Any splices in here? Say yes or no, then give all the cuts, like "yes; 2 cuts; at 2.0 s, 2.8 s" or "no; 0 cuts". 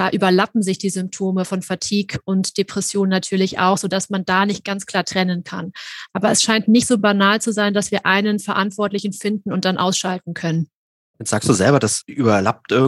no; 0 cuts